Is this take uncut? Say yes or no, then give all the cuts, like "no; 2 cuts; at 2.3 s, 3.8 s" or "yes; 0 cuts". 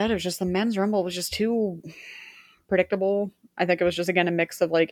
yes; 0 cuts